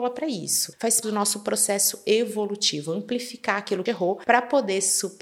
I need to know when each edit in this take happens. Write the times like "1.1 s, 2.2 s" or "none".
1.0 s, 3.9 s